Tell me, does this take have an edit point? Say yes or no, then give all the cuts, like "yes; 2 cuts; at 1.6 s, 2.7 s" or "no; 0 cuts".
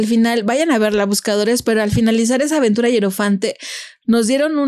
no; 0 cuts